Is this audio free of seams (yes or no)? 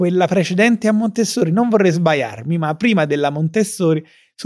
yes